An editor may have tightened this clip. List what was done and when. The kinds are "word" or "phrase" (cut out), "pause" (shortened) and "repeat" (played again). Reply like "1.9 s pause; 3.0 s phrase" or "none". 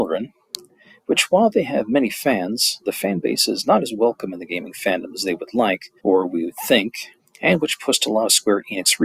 6.0 s pause; 7.2 s pause